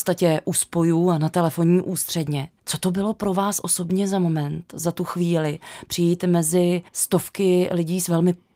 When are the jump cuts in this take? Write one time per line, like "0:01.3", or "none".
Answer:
0:02.6
0:06.9